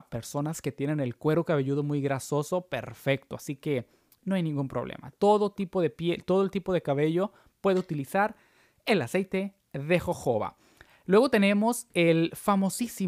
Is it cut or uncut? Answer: uncut